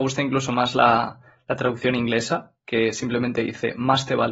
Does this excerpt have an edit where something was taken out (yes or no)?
no